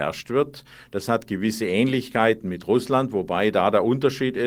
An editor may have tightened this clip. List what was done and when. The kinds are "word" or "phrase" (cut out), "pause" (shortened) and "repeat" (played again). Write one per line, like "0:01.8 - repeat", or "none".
none